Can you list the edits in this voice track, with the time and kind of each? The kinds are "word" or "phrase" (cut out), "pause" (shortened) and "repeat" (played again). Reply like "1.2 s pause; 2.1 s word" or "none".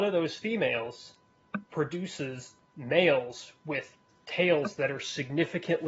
1.7 s pause